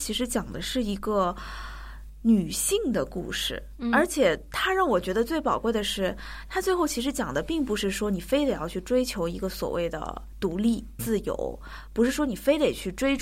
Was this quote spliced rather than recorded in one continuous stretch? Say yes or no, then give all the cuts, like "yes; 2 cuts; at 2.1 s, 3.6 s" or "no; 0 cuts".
yes; 1 cut; at 11.0 s